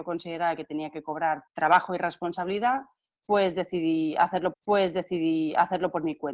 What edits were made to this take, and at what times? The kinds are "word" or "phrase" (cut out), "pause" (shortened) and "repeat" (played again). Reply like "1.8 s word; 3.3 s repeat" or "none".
1.5 s word; 4.5 s repeat